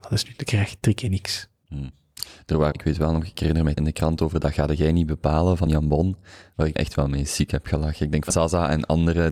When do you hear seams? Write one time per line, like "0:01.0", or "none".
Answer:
0:02.7
0:03.8
0:05.7
0:06.8
0:08.3